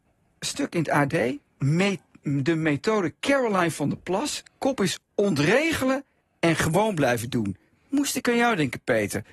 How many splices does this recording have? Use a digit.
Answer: 0